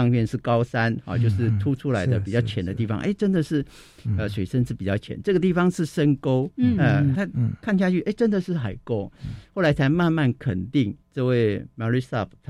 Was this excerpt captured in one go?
no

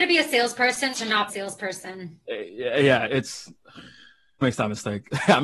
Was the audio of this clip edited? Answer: yes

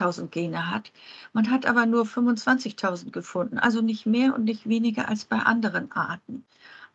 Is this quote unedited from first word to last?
yes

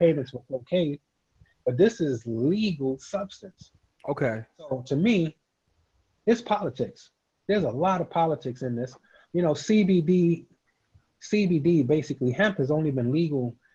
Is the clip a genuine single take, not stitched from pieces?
yes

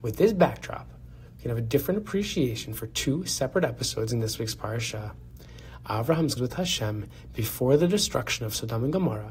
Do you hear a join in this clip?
yes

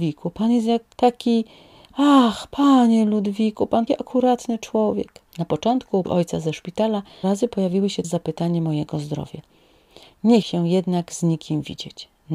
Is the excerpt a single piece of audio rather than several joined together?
no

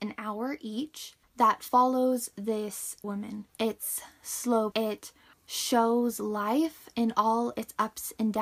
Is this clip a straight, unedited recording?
no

